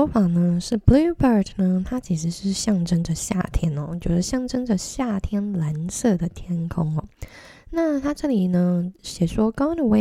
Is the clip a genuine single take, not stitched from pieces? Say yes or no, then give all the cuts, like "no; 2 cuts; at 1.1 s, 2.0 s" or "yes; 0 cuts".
yes; 0 cuts